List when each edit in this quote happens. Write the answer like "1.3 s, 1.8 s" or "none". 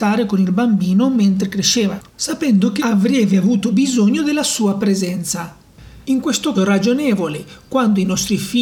2.1 s, 2.8 s, 6.0 s, 6.5 s